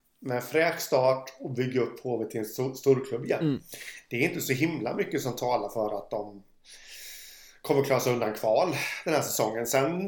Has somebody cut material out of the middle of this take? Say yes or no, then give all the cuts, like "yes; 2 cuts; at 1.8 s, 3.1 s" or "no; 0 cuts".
no; 0 cuts